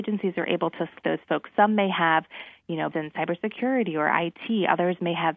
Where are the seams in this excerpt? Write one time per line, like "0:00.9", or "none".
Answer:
0:01.0
0:02.9